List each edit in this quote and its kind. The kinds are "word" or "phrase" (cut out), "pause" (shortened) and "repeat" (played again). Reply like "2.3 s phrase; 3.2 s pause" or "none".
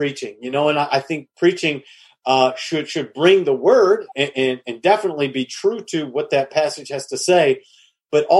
none

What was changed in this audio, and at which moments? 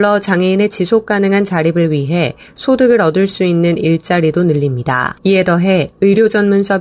5.2 s pause

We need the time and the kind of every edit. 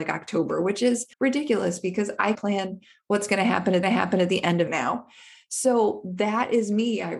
1.1 s pause; 2.3 s word; 3.8 s repeat; 4.7 s phrase

